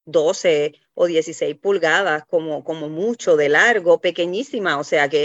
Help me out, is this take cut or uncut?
uncut